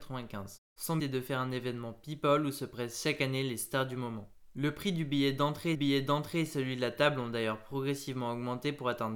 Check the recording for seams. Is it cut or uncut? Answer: cut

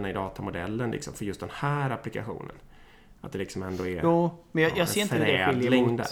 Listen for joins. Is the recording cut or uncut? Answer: uncut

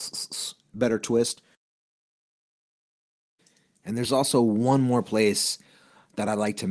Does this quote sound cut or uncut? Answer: uncut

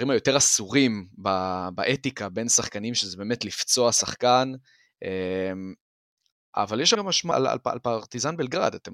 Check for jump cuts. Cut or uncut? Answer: cut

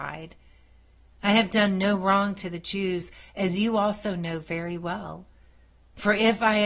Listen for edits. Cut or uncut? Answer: uncut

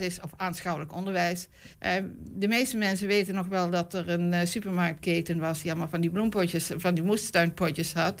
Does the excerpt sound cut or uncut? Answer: cut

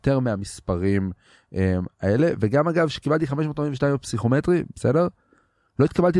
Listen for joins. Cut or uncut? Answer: uncut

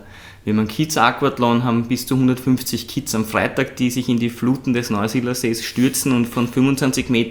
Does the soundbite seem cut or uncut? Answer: uncut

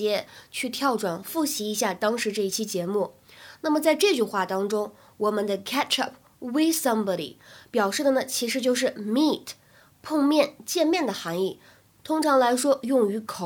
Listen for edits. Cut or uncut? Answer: uncut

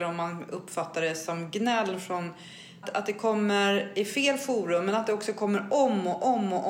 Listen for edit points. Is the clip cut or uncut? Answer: cut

